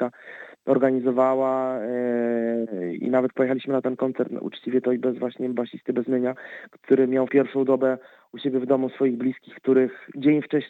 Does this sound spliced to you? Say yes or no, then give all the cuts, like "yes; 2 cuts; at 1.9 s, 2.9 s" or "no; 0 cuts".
yes; 1 cut; at 7.3 s